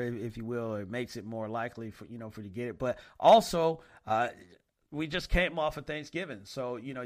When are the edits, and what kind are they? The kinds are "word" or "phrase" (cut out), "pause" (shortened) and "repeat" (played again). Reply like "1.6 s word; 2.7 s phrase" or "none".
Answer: none